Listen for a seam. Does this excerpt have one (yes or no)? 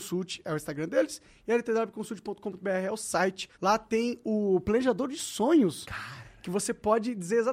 yes